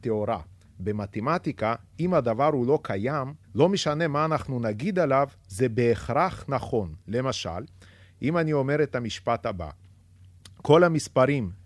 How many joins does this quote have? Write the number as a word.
one